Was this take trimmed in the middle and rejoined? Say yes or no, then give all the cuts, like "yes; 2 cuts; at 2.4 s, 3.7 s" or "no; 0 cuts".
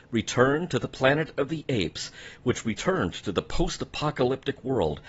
no; 0 cuts